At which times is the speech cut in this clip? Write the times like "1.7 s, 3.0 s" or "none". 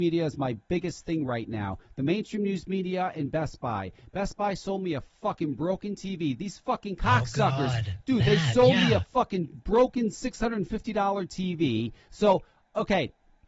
none